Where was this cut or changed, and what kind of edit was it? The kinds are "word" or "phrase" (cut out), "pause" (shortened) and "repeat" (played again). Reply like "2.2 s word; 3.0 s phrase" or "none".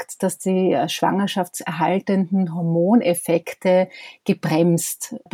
none